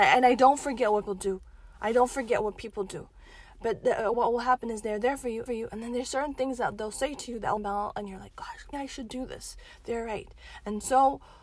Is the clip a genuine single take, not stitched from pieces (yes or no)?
no